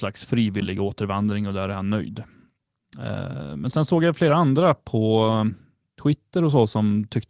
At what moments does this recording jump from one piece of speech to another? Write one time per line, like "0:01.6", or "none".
none